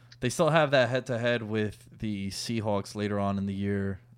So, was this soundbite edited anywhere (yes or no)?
no